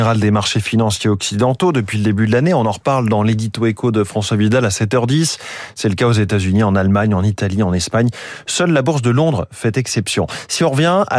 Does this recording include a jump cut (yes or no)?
no